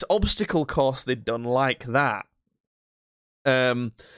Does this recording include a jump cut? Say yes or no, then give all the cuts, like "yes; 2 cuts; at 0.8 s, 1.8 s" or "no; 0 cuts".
no; 0 cuts